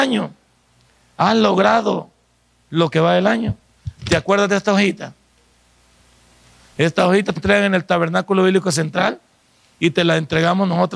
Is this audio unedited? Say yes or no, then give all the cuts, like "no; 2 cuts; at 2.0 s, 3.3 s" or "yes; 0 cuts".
no; 2 cuts; at 2.9 s, 7.4 s